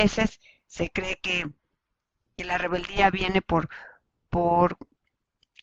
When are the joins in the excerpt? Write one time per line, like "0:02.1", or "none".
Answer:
none